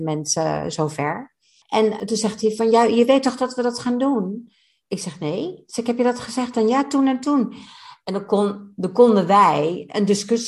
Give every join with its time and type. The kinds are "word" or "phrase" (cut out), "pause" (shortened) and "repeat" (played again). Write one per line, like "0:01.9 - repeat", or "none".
none